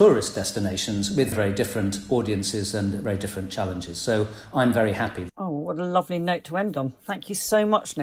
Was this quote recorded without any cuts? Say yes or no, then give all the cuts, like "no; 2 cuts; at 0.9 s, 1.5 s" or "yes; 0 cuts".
no; 1 cut; at 1.3 s